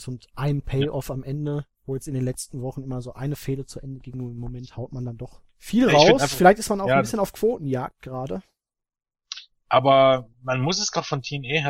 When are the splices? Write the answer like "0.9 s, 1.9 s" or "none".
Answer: 1.7 s, 5.5 s, 10.3 s